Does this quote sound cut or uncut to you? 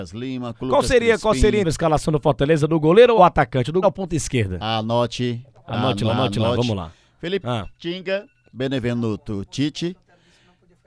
cut